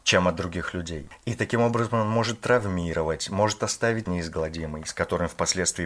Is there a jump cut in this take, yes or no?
yes